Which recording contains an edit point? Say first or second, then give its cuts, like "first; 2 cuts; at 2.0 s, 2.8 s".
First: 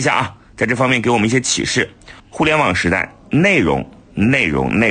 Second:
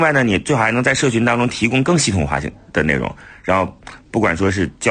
first; 1 cut; at 2.2 s